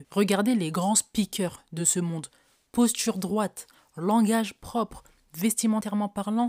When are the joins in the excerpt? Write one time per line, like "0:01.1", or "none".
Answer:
none